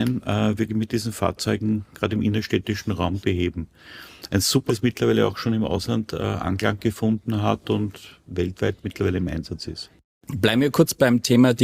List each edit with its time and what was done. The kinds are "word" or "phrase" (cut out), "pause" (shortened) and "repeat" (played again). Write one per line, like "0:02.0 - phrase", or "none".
0:03.2 - word
0:04.7 - word

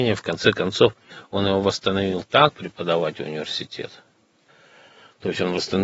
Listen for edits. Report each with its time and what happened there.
0:02.5 - phrase

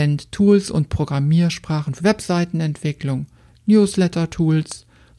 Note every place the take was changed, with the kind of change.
0:02.0 - word

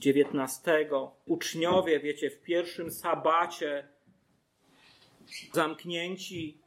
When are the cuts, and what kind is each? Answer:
0:01.3 - word
0:05.5 - word

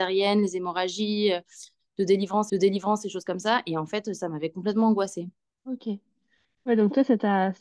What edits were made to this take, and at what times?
0:02.5 - repeat
0:05.5 - pause

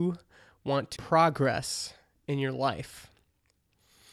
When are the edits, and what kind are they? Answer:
0:01.0 - word

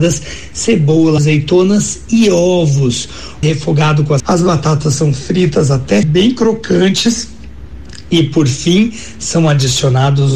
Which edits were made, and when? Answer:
0:01.2 - word
0:03.4 - phrase
0:04.2 - phrase
0:06.0 - word

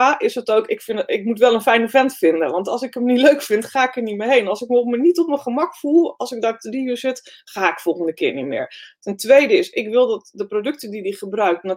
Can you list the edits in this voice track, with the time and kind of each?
none

